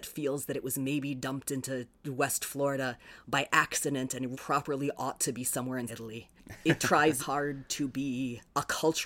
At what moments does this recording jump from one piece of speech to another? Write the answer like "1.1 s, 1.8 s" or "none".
2.0 s, 4.3 s, 5.9 s, 7.2 s